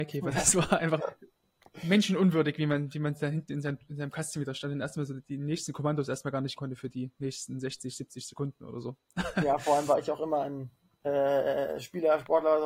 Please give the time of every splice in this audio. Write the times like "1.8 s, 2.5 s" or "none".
1.0 s, 6.6 s, 10.8 s